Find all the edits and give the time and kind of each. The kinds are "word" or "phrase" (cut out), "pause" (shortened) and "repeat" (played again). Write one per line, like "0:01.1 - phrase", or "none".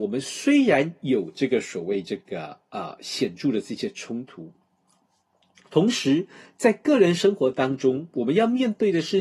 none